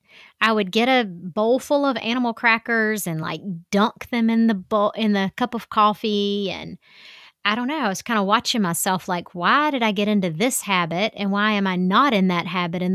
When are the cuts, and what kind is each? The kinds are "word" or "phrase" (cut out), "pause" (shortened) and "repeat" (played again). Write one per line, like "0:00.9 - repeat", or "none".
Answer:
none